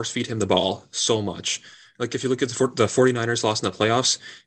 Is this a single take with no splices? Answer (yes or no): yes